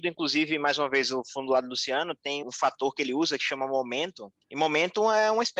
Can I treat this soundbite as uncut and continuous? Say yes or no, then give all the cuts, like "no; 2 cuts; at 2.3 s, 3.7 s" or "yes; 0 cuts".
no; 2 cuts; at 2.4 s, 4.4 s